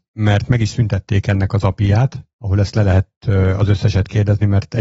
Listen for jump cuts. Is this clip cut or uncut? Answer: uncut